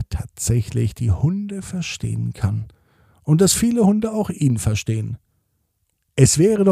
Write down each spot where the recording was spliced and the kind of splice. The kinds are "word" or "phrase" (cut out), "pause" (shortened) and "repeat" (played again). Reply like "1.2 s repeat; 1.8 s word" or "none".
none